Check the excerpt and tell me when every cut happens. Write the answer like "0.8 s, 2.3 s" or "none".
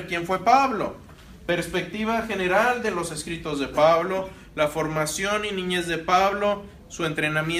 none

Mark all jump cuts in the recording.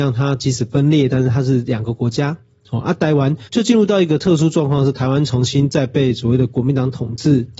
3.5 s

